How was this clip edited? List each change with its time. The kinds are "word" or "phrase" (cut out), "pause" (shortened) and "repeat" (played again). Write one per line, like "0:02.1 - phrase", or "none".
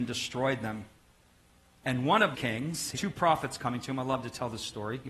0:02.3 - word
0:02.9 - word